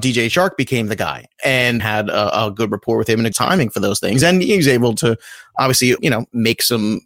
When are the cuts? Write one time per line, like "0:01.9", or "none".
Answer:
0:01.8
0:03.3
0:06.0